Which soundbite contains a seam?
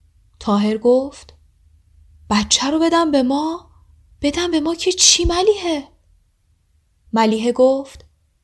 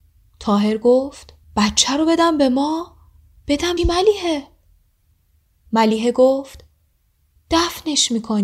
second; 2 cuts; at 1.4 s, 3.8 s

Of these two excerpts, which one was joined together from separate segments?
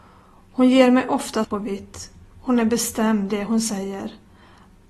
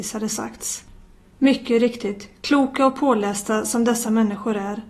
first; 2 cuts; at 1.4 s, 3.3 s

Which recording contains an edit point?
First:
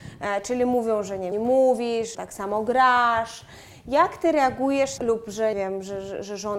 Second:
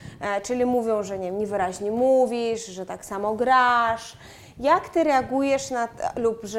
first; 4 cuts; at 1.3 s, 2.1 s, 5.0 s, 5.5 s

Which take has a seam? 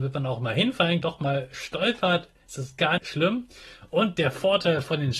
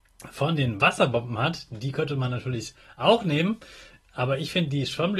first; 2 cuts; at 1.0 s, 3.0 s

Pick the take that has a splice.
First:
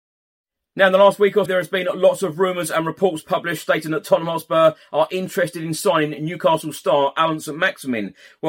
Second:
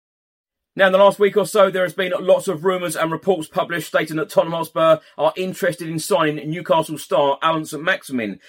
first; 1 cut; at 1.5 s

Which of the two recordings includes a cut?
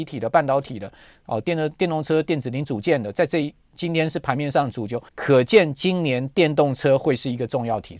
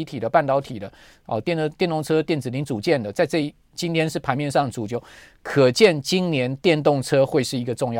first; 1 cut; at 5.1 s

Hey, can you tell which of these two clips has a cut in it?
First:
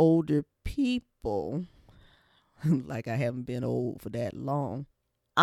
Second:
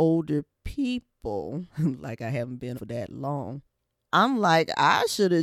second; 2 cuts; at 1.7 s, 2.7 s

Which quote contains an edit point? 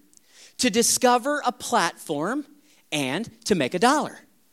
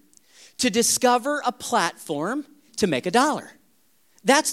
second; 1 cut; at 2.7 s

